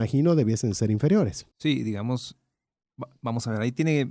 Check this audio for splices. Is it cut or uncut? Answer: cut